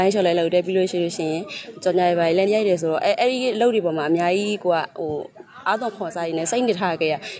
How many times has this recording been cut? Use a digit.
1